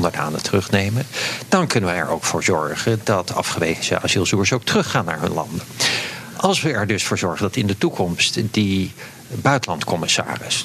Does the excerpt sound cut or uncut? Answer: uncut